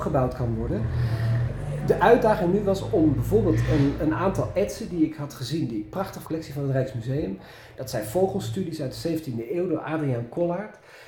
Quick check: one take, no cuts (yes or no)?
no